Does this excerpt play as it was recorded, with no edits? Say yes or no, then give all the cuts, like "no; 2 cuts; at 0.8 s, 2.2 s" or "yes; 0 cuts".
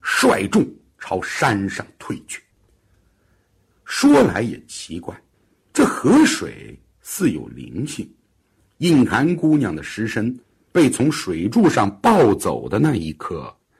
yes; 0 cuts